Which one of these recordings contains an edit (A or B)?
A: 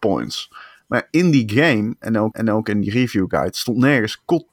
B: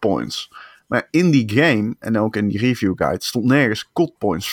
A